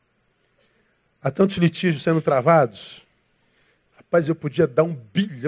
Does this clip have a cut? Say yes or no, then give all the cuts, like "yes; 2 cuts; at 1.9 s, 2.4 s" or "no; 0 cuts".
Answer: no; 0 cuts